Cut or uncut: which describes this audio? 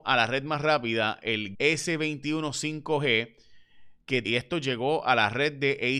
cut